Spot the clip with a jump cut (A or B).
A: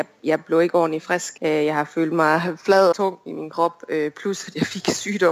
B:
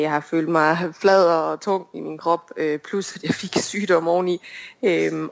A